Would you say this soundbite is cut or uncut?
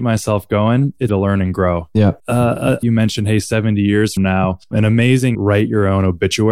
cut